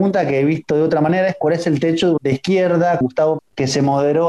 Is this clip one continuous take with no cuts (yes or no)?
no